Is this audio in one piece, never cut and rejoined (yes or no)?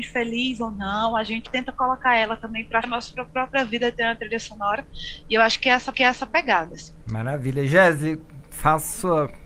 no